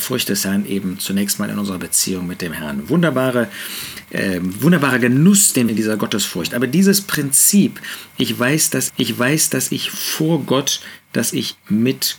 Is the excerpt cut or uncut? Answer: cut